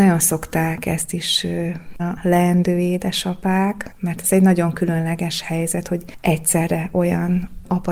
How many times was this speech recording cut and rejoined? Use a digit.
1